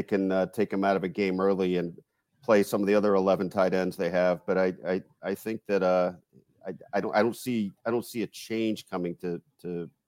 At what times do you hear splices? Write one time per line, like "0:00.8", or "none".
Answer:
none